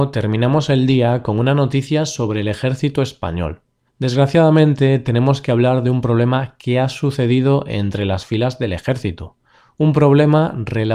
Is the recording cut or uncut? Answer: uncut